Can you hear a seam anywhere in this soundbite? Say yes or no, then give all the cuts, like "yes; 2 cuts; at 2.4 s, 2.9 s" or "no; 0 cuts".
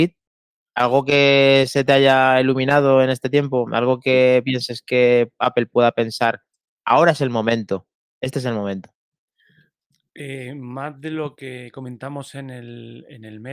no; 0 cuts